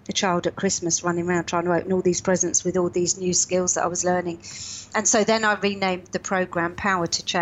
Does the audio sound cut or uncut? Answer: uncut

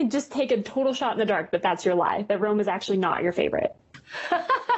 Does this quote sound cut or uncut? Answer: uncut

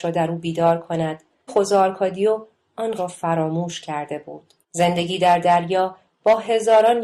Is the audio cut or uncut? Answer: cut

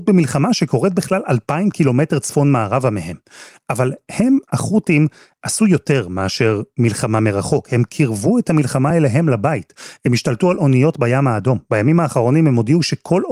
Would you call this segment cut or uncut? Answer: uncut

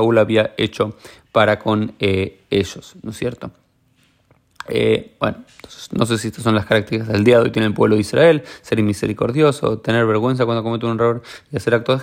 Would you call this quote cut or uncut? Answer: uncut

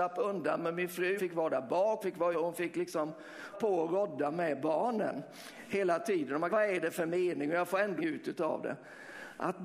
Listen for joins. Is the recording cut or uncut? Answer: cut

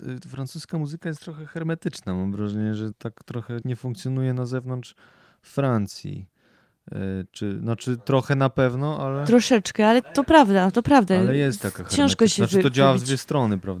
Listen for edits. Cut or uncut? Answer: cut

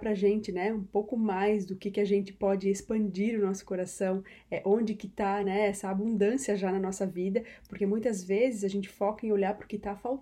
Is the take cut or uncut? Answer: uncut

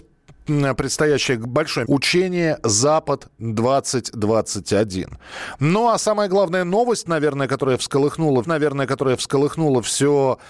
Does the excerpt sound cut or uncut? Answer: cut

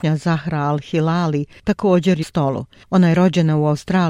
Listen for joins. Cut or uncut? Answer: cut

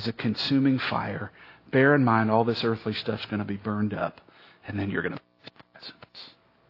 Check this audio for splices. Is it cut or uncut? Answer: uncut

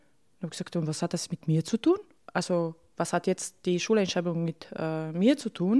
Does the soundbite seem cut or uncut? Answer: uncut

